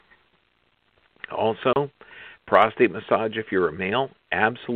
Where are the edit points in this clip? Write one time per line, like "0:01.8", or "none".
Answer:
none